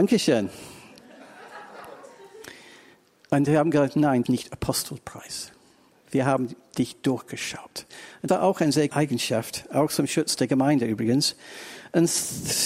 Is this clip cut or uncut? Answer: cut